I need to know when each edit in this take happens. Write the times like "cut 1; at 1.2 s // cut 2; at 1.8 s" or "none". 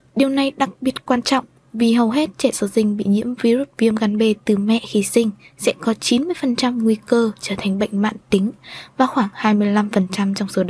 none